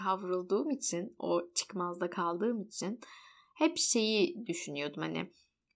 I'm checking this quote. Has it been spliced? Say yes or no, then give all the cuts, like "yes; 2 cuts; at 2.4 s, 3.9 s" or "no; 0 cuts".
no; 0 cuts